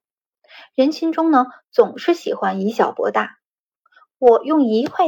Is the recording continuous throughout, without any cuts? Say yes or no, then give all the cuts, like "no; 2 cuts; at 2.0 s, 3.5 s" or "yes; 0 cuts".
yes; 0 cuts